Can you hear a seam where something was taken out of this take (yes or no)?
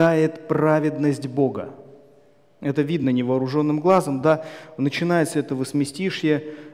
no